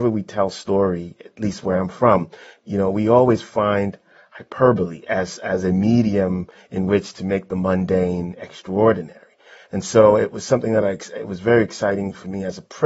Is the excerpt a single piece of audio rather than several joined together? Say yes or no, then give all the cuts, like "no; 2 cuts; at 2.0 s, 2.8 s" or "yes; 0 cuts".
yes; 0 cuts